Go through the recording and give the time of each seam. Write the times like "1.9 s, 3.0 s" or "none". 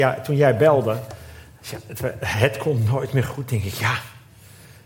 none